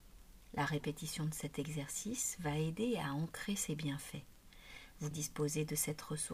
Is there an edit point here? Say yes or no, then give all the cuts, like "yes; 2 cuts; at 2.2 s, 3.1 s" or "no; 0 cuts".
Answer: yes; 1 cut; at 5.1 s